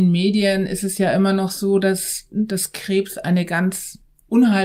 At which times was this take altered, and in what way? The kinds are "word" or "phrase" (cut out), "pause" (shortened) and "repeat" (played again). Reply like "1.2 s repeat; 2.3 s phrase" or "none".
none